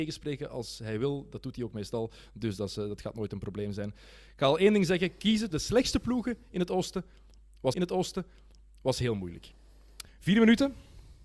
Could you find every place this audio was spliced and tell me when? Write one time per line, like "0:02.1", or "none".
0:05.5
0:07.7
0:10.1